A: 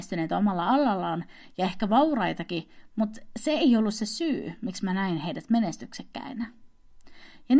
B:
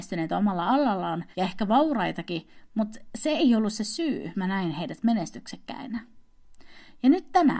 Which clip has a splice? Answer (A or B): B